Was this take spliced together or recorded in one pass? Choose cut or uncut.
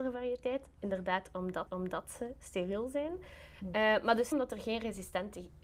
cut